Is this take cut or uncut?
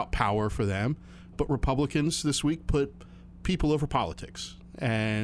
uncut